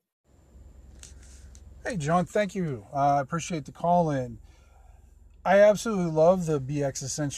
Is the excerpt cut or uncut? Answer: uncut